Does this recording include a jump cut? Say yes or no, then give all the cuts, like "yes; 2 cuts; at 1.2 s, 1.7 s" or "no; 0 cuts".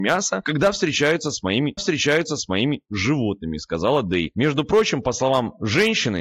yes; 1 cut; at 1.8 s